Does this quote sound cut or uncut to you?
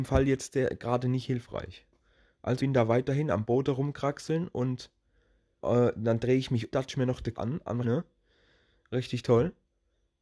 cut